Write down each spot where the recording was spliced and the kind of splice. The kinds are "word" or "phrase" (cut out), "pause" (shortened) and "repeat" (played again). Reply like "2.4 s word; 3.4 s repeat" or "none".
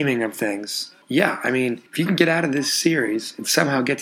1.0 s pause; 1.9 s pause